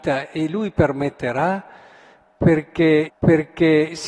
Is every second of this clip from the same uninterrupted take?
no; 1 cut; at 3.1 s

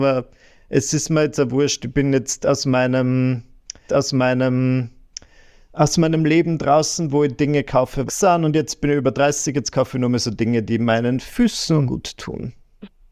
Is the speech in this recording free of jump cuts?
no; 3 cuts; at 3.9 s, 8.1 s, 11.9 s

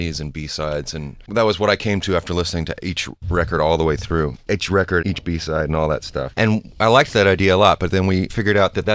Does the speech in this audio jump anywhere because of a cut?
no; 0 cuts

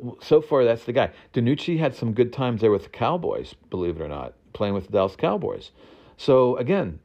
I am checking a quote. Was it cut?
no; 0 cuts

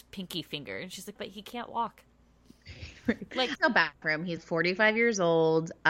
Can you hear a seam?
yes; 4 cuts; at 1.2 s, 3.5 s, 4.0 s, 4.4 s

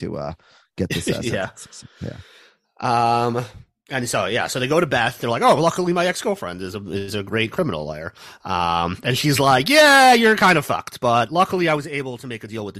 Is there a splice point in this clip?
no; 0 cuts

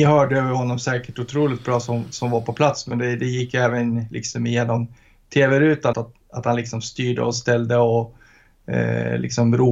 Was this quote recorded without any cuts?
no; 1 cut; at 5.9 s

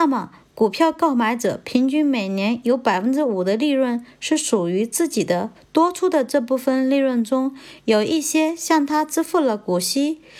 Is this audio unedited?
no; 1 cut; at 5.6 s

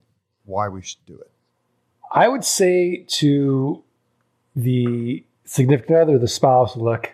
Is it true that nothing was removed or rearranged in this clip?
yes; 0 cuts

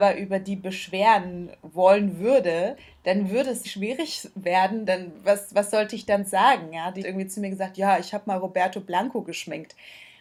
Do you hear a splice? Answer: yes; 3 cuts; at 3.6 s, 4.9 s, 7.0 s

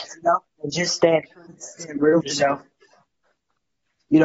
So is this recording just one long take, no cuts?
no; 2 cuts; at 1.5 s, 2.2 s

